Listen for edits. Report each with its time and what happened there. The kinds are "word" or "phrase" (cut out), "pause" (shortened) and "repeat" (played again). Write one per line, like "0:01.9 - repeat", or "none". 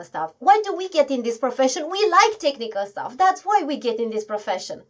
none